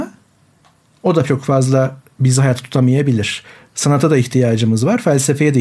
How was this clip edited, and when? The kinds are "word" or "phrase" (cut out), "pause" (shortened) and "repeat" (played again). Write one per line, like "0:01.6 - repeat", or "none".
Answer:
none

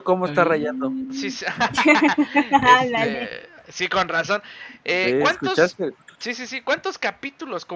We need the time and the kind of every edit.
none

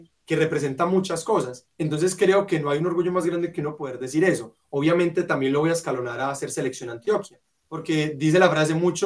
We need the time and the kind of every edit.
none

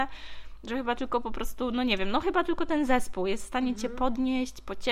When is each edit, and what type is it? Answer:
none

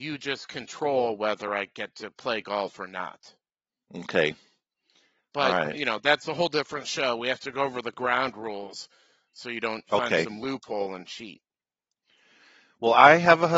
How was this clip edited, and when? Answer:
none

